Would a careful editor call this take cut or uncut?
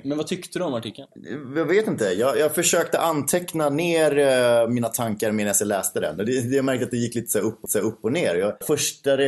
cut